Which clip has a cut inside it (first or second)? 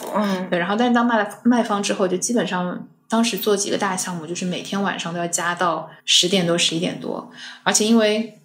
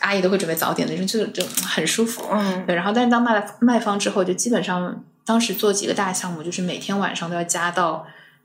first